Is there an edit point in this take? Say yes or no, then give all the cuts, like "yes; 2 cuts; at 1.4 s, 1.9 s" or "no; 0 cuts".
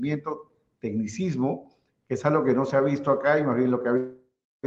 no; 0 cuts